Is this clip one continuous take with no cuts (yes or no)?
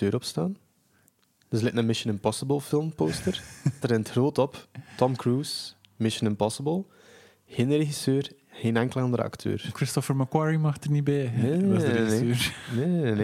no